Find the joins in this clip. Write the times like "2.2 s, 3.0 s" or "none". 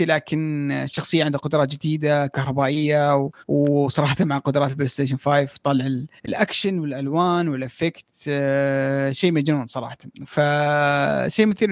3.4 s, 6.2 s